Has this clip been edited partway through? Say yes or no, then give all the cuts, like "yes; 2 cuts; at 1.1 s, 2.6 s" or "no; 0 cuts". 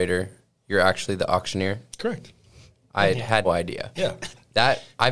yes; 1 cut; at 3.4 s